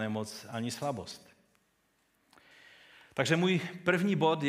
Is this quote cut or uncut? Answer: uncut